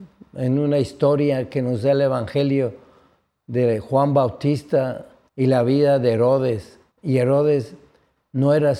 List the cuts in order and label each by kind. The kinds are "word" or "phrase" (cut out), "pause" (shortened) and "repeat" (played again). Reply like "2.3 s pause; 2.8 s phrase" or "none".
5.3 s pause; 6.9 s pause

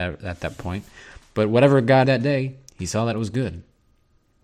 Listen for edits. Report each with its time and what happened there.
2.1 s word

